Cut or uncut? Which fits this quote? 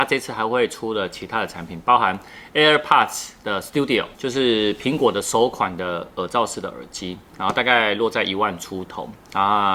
cut